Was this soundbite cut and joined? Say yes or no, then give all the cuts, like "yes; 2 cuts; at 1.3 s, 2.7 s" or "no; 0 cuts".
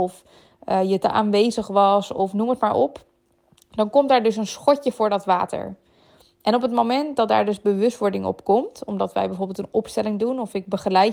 no; 0 cuts